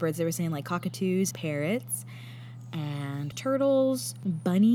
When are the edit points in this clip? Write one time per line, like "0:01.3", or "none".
0:01.3
0:03.3